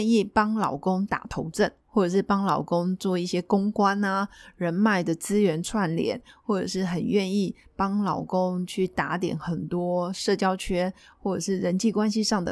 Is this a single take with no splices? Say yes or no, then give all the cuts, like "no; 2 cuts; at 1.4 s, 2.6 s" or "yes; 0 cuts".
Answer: yes; 0 cuts